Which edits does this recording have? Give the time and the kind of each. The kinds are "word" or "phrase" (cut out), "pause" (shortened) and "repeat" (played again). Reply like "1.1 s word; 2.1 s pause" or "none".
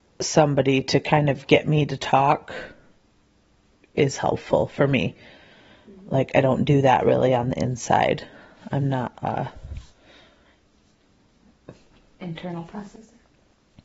none

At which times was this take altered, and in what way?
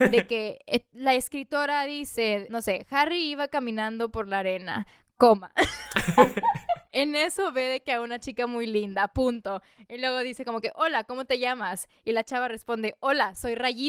none

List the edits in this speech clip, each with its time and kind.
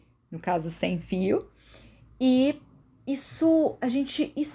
2.8 s pause

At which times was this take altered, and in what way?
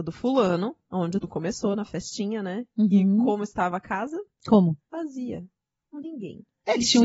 1.2 s word; 6.0 s word

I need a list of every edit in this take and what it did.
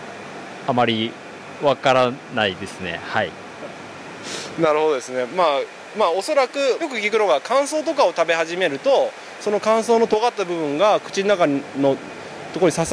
6.8 s phrase

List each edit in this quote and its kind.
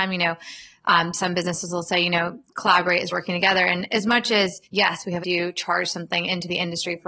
3.1 s word; 4.6 s pause; 5.2 s phrase

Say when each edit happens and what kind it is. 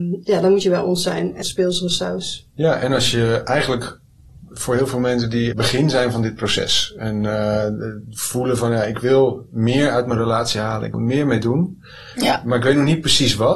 1.4 s phrase; 5.5 s phrase; 10.9 s word

